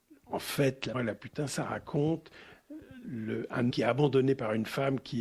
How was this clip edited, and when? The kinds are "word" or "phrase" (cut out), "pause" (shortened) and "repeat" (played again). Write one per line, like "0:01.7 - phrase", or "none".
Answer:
0:00.9 - word
0:03.0 - word
0:03.7 - word